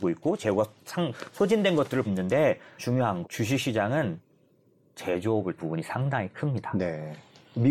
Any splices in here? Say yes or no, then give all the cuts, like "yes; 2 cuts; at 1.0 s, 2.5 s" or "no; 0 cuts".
yes; 4 cuts; at 2.0 s, 2.8 s, 3.2 s, 5.6 s